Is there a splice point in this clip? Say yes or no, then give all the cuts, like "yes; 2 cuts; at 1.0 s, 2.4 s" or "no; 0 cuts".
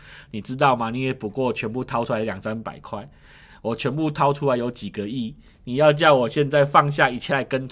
no; 0 cuts